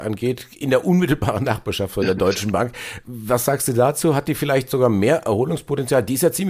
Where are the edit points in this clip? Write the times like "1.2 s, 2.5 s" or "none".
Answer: none